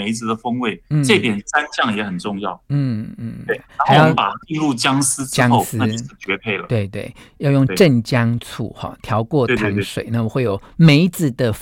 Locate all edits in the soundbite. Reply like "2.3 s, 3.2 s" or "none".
4.4 s